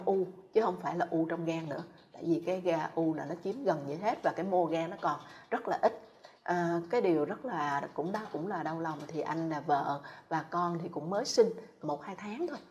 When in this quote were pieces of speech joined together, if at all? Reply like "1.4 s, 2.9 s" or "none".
6.4 s, 11.8 s